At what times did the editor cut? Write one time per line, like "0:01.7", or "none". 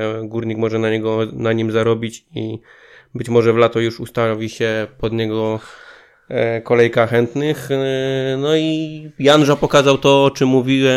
none